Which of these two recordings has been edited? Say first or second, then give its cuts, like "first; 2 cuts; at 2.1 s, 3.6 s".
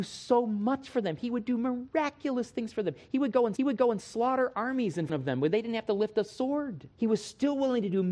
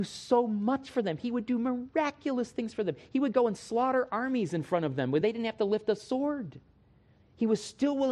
first; 3 cuts; at 3.6 s, 5.1 s, 6.9 s